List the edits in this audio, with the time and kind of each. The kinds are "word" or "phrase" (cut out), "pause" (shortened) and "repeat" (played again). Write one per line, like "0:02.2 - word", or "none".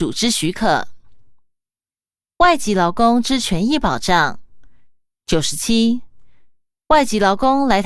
none

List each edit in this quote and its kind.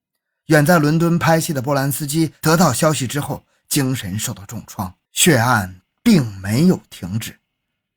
0:05.0 - pause

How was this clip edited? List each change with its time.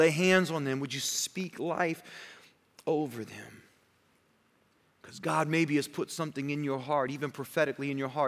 none

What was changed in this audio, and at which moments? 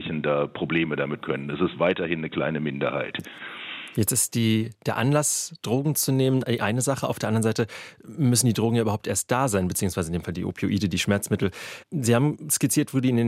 0:01.2 - word

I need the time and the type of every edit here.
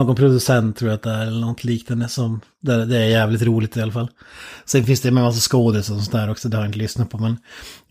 none

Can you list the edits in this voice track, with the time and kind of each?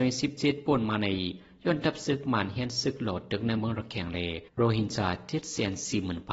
0:04.5 - pause

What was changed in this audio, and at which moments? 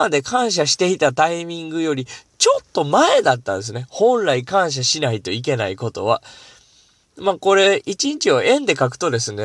none

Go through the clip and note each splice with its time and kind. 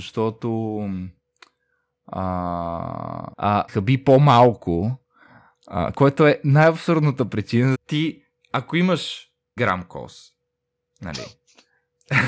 0:03.3 - word
0:03.7 - word
0:05.9 - word
0:07.7 - word
0:09.6 - word

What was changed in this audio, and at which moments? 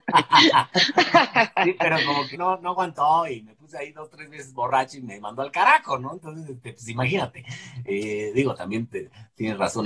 0:02.3 - word

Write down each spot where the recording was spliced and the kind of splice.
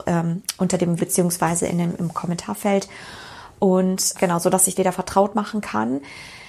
0:01.0 - word
0:04.1 - word
0:04.7 - word

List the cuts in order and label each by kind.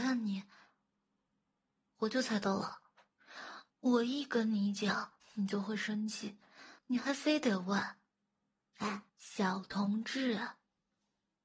0:03.7 - pause
0:05.2 - pause
0:06.8 - pause
0:09.1 - pause

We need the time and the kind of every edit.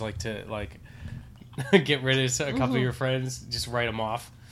none

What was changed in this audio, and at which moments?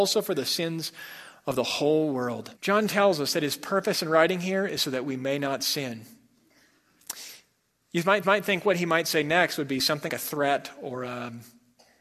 0:02.6 - pause
0:08.2 - repeat
0:10.1 - word

